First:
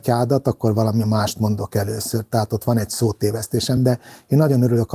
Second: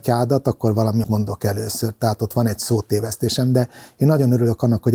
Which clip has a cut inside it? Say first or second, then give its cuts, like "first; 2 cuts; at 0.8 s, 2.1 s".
second; 1 cut; at 1.0 s